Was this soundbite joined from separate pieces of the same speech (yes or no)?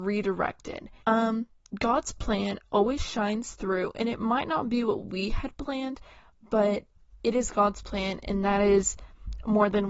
yes